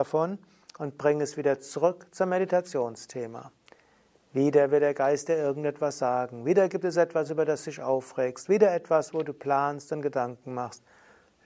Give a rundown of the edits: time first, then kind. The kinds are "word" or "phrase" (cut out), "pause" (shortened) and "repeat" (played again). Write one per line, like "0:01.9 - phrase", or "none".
none